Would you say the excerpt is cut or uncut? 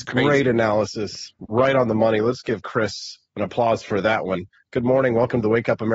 uncut